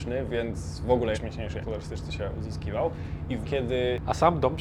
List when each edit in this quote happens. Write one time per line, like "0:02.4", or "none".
0:01.1
0:01.6
0:03.4

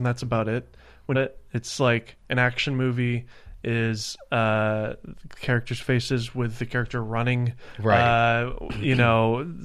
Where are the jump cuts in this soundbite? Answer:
0:01.1

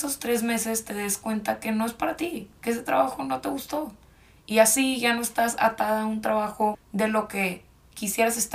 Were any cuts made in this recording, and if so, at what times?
0:06.7

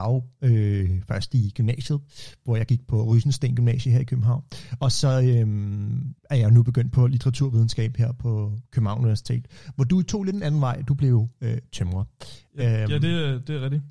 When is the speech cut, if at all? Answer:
0:06.2

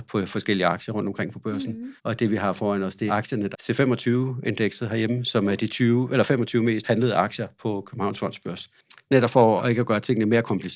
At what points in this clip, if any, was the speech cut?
0:02.0
0:03.1
0:03.5
0:09.0
0:09.6

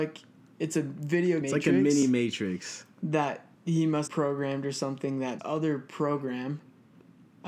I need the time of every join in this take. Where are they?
0:01.4
0:03.5
0:04.1
0:05.4

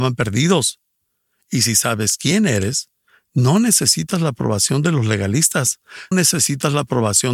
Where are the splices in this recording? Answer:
0:06.1

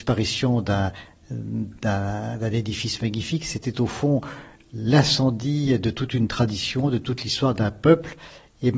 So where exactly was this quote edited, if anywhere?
none

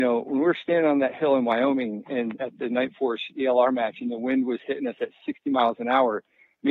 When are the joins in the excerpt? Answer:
none

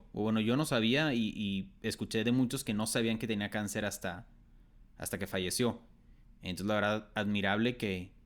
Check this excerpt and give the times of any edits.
none

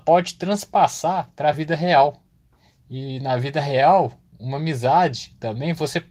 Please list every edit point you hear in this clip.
none

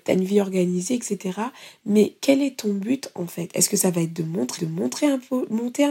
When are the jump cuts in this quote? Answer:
0:04.6

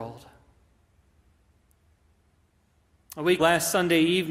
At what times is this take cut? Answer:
0:03.4

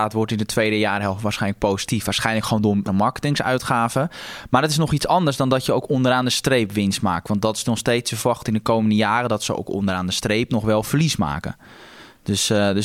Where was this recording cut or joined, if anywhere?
0:02.9

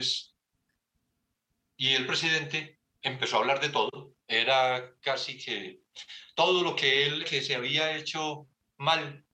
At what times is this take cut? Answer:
0:02.9
0:04.2
0:07.2

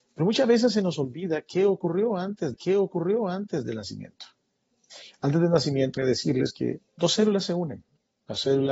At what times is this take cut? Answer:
0:02.5
0:06.0
0:06.9

